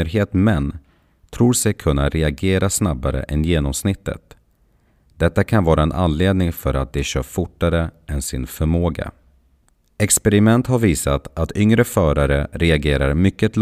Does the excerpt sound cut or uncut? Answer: uncut